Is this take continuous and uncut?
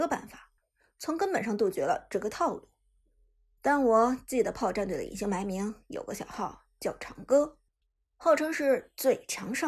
yes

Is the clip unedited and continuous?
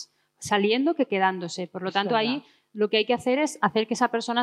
yes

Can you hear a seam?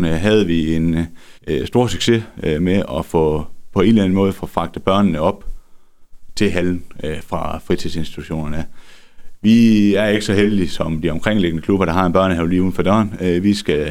yes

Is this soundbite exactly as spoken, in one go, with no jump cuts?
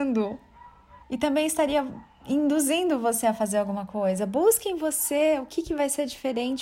no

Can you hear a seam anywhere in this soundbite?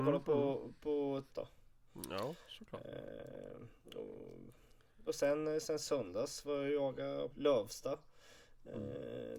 yes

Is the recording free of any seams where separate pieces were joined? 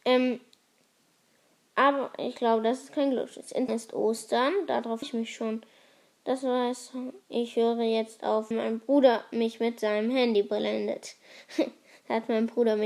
no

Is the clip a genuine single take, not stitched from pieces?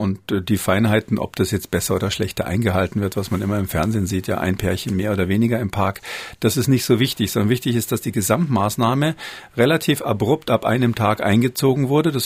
yes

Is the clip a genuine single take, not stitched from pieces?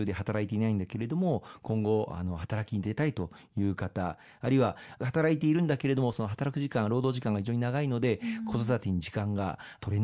yes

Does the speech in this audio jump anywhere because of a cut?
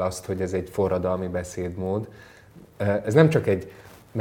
no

